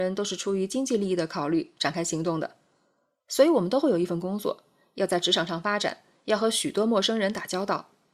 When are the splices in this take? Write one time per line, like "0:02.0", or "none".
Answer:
none